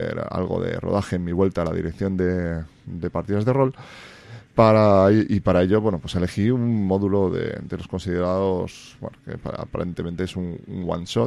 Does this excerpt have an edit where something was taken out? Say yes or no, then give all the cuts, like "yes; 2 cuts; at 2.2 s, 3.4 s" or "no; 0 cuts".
yes; 1 cut; at 4.5 s